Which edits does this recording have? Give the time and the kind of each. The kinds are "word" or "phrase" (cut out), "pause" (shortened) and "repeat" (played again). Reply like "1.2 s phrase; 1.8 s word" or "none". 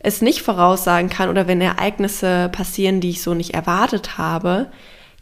none